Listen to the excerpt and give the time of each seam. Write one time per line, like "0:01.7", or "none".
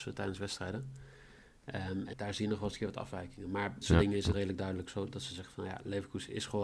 0:02.1
0:03.8
0:04.3

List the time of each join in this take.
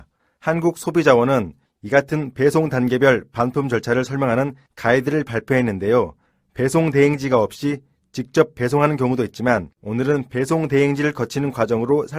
0:09.7

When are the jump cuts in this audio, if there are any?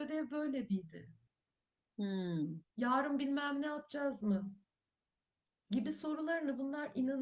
none

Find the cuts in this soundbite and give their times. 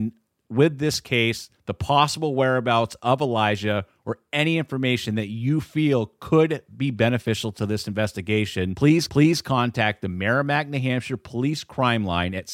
0:01.6
0:09.1

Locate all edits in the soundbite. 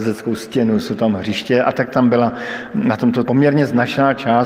0:03.2

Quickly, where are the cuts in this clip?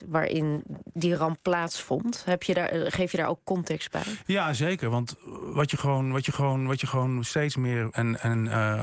0:06.2
0:07.9

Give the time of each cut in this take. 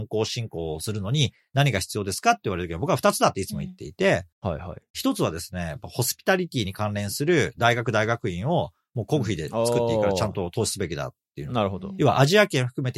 0:04.3

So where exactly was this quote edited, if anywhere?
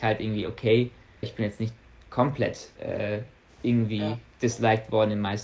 0:01.2
0:02.8

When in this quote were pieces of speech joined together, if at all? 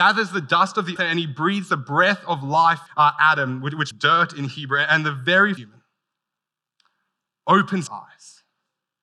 0:01.0
0:02.9
0:03.9
0:05.6
0:07.9

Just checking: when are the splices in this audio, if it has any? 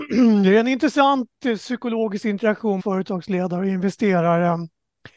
0:02.8

